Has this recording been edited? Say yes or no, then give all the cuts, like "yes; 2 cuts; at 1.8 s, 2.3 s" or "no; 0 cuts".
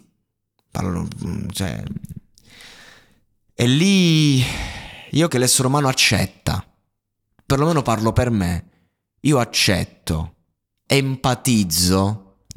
yes; 2 cuts; at 5.3 s, 10.9 s